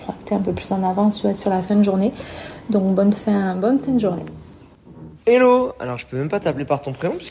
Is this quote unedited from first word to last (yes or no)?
no